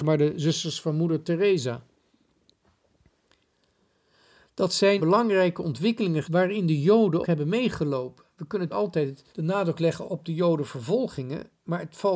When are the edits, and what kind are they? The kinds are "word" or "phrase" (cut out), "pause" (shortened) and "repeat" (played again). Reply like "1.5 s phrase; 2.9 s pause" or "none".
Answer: 5.0 s word; 6.2 s word; 7.2 s word; 8.7 s word; 9.3 s pause; 10.1 s word